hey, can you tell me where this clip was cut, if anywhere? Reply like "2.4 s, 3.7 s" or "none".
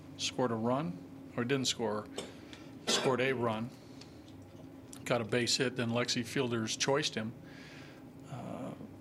none